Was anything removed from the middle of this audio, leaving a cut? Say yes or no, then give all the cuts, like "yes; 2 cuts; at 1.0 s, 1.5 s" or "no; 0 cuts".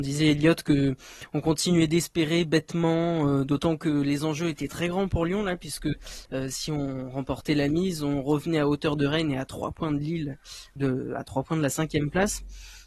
yes; 1 cut; at 10.8 s